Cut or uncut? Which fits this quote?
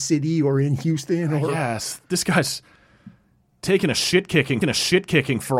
cut